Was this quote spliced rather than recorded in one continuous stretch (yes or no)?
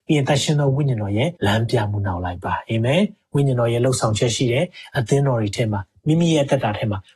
yes